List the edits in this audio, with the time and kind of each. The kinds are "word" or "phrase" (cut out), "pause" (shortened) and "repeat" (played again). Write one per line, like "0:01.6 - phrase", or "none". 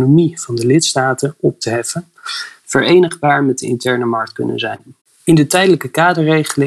0:05.0 - pause